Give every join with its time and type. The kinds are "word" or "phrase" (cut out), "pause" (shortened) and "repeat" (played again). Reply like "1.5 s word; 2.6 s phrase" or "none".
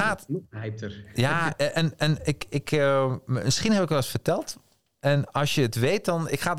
none